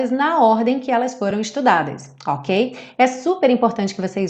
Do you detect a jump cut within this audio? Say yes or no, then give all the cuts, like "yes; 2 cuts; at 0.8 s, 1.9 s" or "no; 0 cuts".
no; 0 cuts